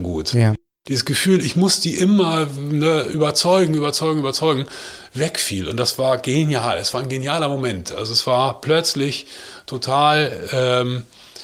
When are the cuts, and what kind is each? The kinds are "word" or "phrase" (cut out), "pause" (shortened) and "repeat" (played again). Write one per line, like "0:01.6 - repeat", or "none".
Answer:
none